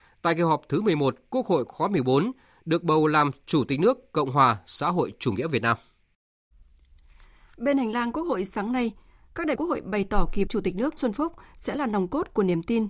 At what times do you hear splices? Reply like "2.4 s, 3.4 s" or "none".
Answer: 9.6 s, 10.5 s, 11.0 s

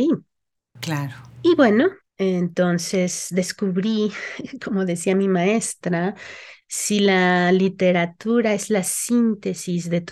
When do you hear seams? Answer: 2.0 s

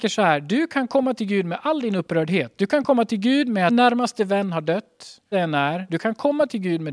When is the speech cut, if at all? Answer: 3.7 s, 5.3 s

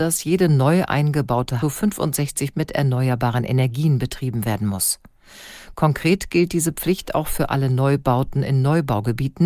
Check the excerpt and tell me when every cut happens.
1.6 s, 2.5 s

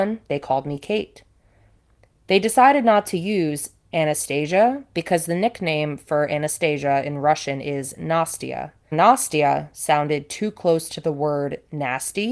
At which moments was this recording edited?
8.9 s

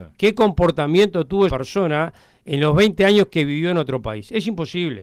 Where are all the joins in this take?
1.5 s

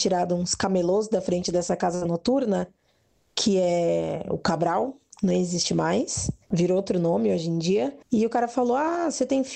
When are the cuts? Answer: 6.4 s, 8.0 s

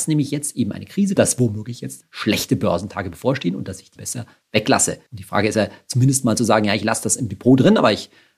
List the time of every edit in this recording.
1.2 s, 2.0 s, 4.0 s, 5.1 s

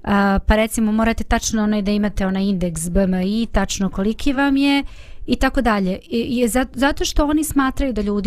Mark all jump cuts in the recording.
none

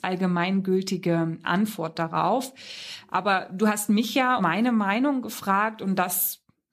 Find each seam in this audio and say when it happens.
4.4 s

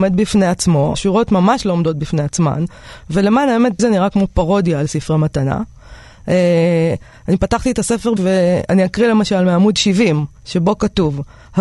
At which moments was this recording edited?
0.9 s, 3.8 s, 8.2 s, 10.4 s

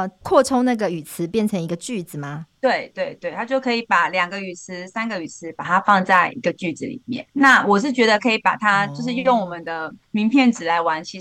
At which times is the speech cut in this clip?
7.3 s

